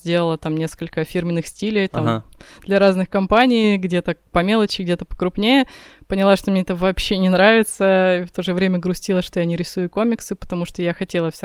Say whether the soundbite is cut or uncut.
uncut